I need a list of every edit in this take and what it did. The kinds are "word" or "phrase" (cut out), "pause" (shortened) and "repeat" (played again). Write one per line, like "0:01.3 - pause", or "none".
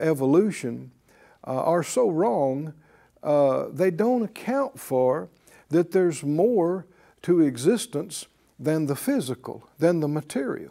none

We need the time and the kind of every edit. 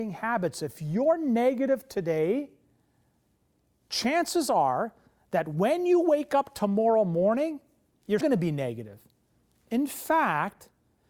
0:08.2 - word

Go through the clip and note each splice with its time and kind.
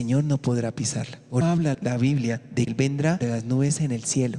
0:01.4 - word
0:01.7 - word
0:02.7 - word
0:03.2 - word

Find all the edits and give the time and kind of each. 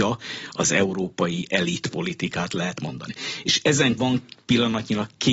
0:04.0 - word

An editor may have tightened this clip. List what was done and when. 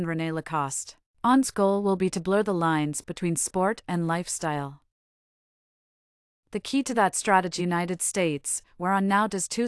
0:01.0 - pause
0:07.6 - phrase

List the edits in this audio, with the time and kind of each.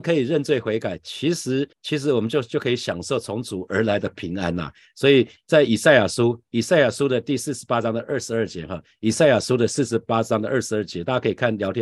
0:01.7 - pause

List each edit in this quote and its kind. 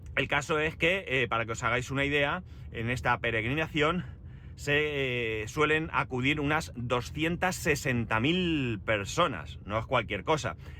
none

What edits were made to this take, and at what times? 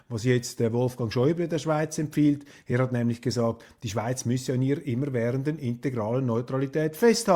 none

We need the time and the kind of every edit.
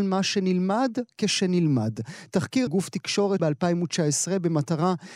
0:02.7 - word
0:03.4 - word

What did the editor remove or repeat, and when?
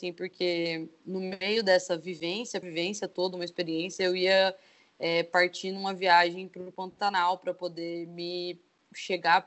0:01.0 - word
0:02.6 - phrase

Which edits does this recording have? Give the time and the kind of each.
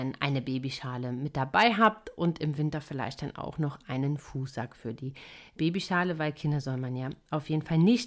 none

